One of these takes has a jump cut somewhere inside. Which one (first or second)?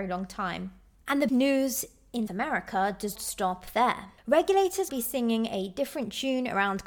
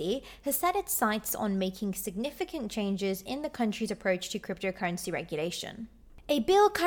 first